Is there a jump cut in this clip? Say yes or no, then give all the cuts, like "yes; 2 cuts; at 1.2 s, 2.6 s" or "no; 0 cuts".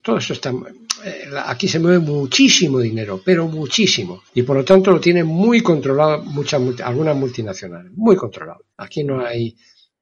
yes; 2 cuts; at 4.3 s, 8.7 s